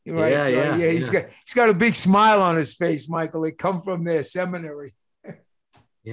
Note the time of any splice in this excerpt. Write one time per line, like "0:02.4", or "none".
none